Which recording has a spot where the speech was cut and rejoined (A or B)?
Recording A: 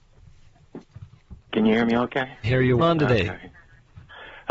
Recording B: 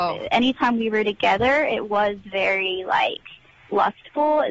A